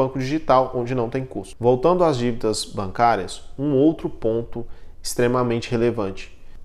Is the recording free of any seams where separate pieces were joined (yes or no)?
yes